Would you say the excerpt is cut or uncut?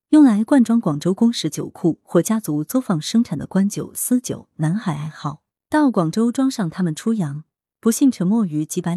uncut